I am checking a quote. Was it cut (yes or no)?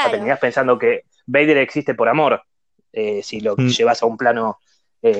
no